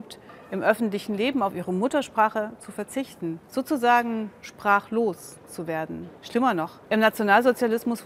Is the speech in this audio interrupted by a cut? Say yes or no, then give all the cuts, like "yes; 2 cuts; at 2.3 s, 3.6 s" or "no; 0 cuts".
yes; 3 cuts; at 3.4 s, 6.2 s, 6.9 s